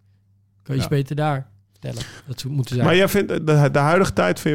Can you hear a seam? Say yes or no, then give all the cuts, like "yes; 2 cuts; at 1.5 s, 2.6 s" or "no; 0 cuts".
yes; 1 cut; at 2.2 s